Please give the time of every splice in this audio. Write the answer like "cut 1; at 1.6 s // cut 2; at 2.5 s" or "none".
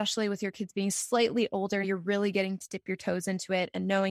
cut 1; at 1.8 s